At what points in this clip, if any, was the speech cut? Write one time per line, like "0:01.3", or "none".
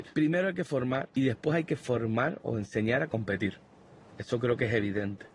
none